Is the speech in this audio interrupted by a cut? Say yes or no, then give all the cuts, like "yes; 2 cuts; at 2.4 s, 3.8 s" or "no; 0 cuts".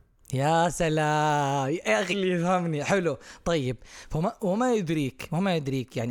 yes; 1 cut; at 2.1 s